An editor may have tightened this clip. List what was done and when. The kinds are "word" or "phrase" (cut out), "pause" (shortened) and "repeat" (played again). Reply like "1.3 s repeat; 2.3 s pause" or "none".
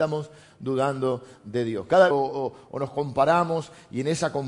2.1 s phrase